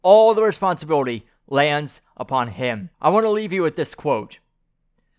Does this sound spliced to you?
yes; 1 cut; at 2.9 s

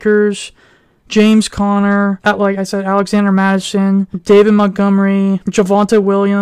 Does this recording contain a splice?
no; 0 cuts

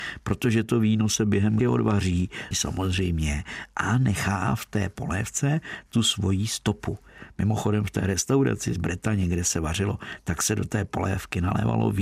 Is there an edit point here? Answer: yes; 2 cuts; at 1.6 s, 2.5 s

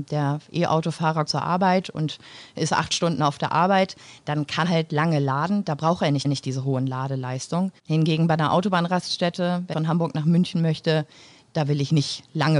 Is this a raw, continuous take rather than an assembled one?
no; 5 cuts; at 1.3 s, 4.6 s, 6.2 s, 7.8 s, 9.7 s

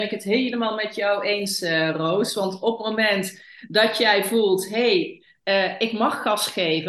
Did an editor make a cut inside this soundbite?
no; 0 cuts

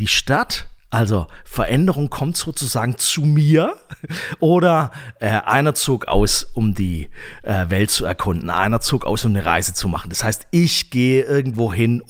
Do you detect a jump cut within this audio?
no; 0 cuts

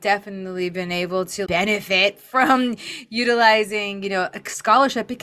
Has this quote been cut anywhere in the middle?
yes; 1 cut; at 1.5 s

